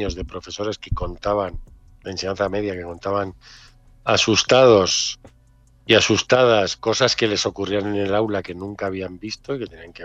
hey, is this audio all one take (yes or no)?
yes